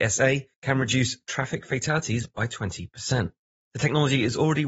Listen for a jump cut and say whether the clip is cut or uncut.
uncut